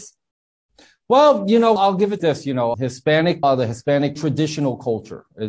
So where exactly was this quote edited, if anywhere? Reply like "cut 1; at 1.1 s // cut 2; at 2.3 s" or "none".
cut 1; at 1.8 s // cut 2; at 2.2 s // cut 3; at 2.7 s // cut 4; at 3.4 s // cut 5; at 4.2 s

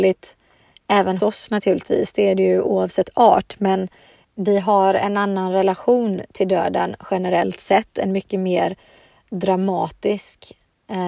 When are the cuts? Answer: cut 1; at 1.2 s // cut 2; at 4.2 s

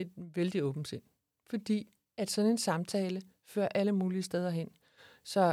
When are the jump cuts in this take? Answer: none

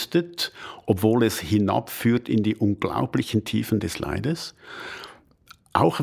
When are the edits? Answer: none

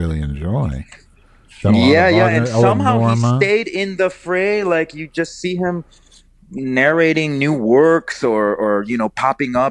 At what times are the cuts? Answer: none

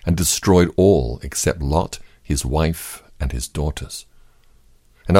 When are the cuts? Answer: none

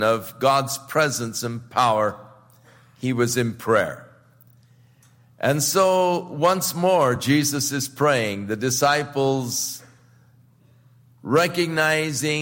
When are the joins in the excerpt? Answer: none

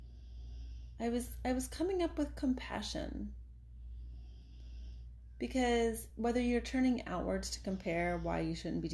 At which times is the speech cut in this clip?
none

